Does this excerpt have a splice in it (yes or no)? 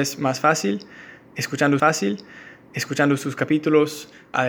yes